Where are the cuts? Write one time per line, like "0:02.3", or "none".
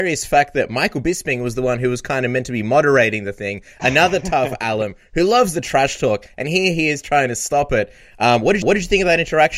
0:08.6